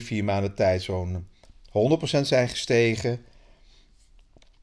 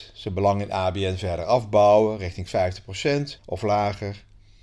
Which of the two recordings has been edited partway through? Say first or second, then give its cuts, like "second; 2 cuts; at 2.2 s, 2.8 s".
second; 1 cut; at 3.4 s